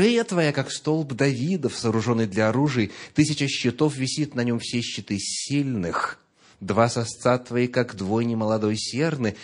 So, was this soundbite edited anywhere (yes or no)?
no